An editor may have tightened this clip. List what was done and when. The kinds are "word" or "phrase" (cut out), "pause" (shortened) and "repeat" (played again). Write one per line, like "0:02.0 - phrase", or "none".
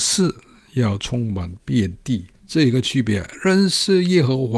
0:02.3 - pause

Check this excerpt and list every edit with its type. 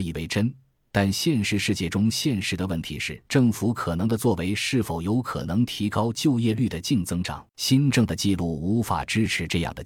0:03.3 - pause
0:07.5 - pause

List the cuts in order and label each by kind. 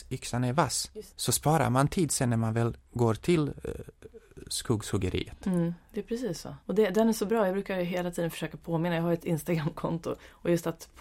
0:01.1 - pause
0:02.8 - pause
0:06.6 - pause

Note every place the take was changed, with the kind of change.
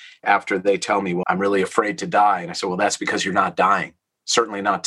0:01.2 - word

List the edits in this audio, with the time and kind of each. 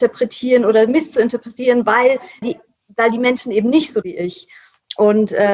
0:02.4 - word
0:04.0 - word

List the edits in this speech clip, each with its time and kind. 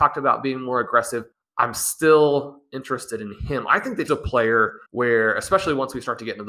0:01.3 - pause
0:04.1 - word
0:04.9 - pause

